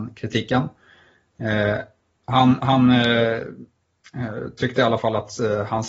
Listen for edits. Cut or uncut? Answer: uncut